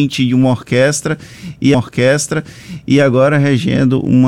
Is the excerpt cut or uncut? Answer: cut